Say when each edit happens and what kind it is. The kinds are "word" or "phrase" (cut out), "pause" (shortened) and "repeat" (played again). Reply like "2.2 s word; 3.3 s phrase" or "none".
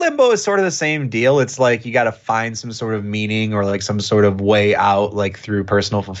none